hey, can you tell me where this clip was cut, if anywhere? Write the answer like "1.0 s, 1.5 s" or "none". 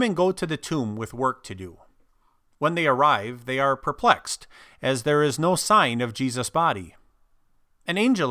none